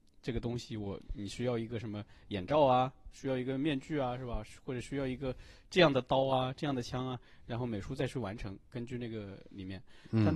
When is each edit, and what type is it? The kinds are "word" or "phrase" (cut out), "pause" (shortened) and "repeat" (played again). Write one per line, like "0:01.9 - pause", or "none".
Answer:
none